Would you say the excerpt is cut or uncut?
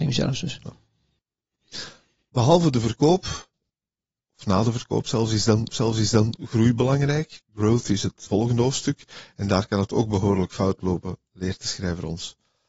cut